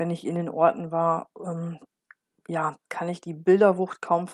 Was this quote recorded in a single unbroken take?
yes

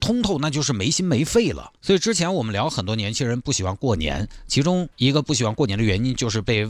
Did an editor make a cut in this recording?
yes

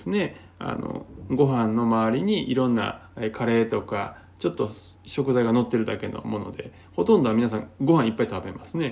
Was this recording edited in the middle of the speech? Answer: yes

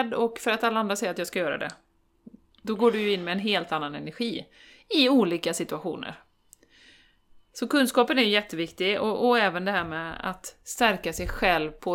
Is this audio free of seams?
yes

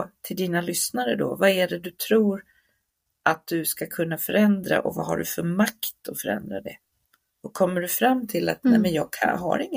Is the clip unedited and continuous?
yes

